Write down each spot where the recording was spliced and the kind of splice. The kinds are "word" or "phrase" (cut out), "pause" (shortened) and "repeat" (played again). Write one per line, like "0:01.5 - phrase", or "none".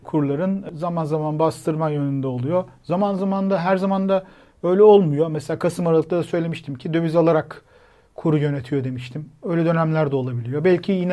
none